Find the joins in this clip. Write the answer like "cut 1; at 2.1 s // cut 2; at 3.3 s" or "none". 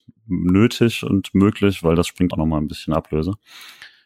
cut 1; at 2.3 s